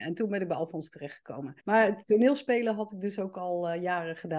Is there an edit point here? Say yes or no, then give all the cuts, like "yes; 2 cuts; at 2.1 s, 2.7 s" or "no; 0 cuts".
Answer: yes; 1 cut; at 1.6 s